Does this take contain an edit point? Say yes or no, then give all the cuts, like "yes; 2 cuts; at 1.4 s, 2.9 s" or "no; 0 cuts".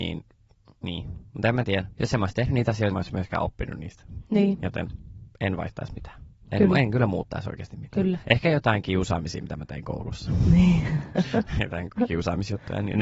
yes; 1 cut; at 2.9 s